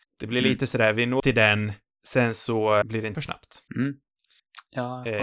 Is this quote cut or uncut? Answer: cut